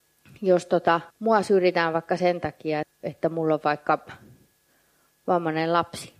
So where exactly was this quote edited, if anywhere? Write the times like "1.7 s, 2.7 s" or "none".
1.1 s, 2.8 s